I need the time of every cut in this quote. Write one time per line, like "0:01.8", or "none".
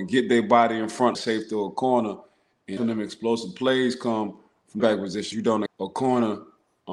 0:01.1
0:02.8
0:04.8
0:05.3
0:05.7